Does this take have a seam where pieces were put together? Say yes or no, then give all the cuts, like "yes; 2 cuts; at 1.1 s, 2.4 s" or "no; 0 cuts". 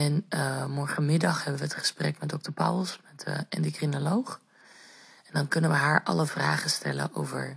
no; 0 cuts